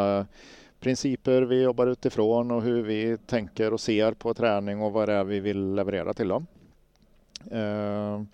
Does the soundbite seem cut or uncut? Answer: uncut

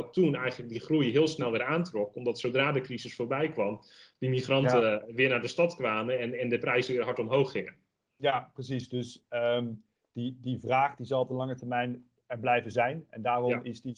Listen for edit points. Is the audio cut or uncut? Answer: uncut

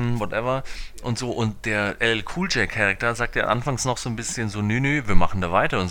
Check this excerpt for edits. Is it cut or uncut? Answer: uncut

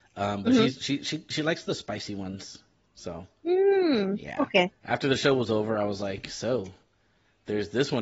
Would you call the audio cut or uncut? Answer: uncut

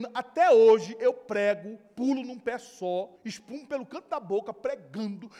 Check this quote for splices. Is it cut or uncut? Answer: cut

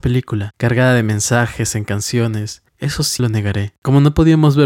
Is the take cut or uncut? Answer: cut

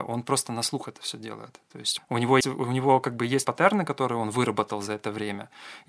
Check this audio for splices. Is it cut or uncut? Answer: cut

